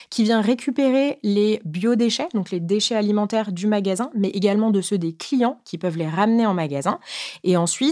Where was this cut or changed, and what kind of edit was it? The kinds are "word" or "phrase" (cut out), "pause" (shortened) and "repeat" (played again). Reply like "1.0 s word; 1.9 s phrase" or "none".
none

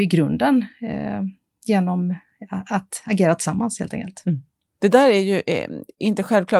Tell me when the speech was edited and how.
none

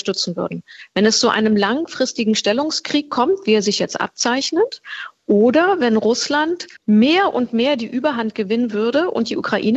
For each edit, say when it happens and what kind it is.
6.8 s pause

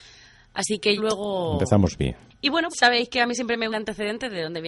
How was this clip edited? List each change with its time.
1.0 s word; 2.7 s word; 3.7 s phrase

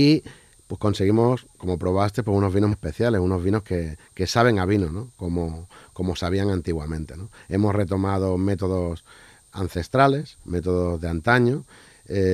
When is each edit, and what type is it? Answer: 2.7 s word; 10.4 s pause

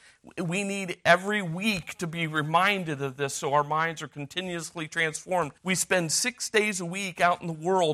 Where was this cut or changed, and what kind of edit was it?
5.6 s pause

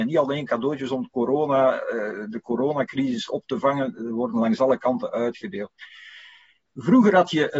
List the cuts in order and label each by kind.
none

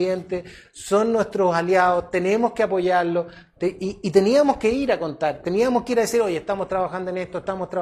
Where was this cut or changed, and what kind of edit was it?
none

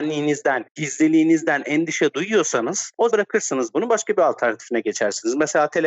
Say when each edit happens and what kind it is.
3.1 s word

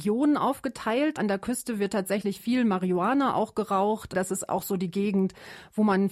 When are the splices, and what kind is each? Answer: none

